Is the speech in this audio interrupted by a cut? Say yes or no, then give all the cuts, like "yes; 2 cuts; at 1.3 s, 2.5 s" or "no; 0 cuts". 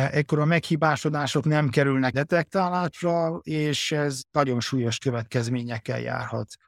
yes; 1 cut; at 2.1 s